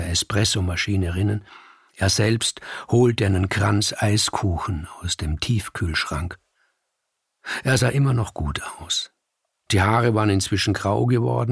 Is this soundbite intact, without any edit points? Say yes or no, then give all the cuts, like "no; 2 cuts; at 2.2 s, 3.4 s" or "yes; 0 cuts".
yes; 0 cuts